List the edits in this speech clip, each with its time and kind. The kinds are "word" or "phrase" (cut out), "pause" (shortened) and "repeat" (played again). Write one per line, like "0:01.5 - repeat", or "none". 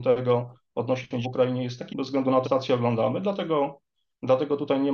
0:01.2 - word
0:01.9 - word
0:02.4 - word